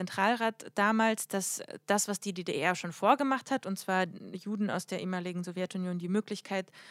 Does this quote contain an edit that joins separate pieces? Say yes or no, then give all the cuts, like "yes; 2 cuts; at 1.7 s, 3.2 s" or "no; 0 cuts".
no; 0 cuts